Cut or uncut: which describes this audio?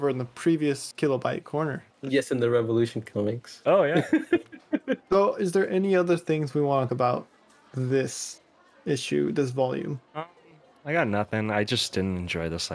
cut